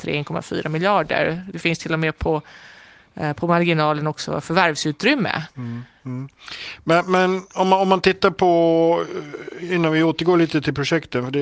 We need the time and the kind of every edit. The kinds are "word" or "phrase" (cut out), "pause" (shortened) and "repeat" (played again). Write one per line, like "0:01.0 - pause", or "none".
none